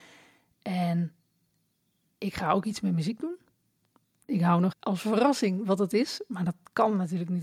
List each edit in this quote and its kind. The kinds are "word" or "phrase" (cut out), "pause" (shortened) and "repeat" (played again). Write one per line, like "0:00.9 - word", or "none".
0:04.7 - word